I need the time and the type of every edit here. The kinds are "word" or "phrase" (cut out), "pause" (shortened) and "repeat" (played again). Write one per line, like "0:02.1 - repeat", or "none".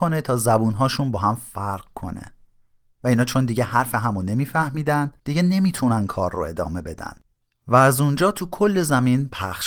0:05.2 - pause